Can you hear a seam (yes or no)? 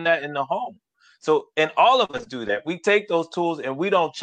no